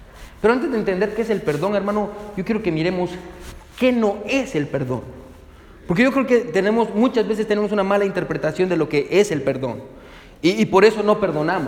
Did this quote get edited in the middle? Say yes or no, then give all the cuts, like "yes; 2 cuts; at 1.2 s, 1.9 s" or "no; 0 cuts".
no; 0 cuts